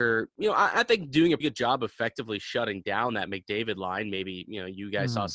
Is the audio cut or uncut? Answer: cut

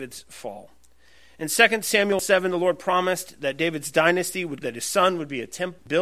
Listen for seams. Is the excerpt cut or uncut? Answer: cut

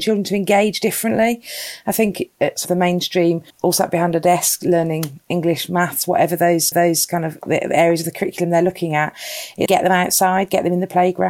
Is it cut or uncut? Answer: cut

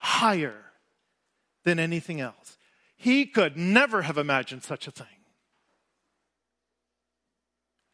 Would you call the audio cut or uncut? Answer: uncut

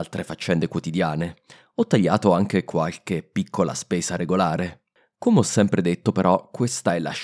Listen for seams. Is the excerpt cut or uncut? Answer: uncut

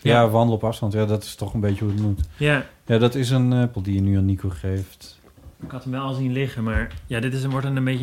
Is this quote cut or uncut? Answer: cut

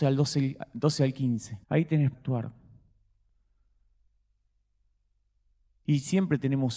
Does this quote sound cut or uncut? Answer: cut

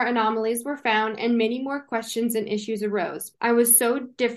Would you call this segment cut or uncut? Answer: cut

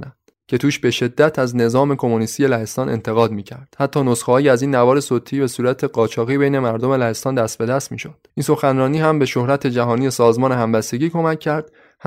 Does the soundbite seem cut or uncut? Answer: cut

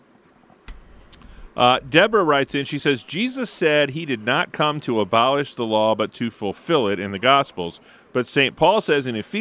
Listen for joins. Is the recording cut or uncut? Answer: uncut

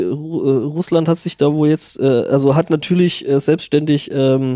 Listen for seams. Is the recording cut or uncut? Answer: uncut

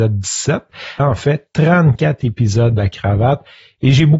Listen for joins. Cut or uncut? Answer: cut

